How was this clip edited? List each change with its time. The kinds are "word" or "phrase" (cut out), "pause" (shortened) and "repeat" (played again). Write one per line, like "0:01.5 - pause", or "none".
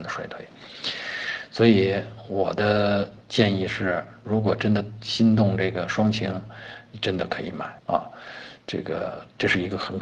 0:07.8 - pause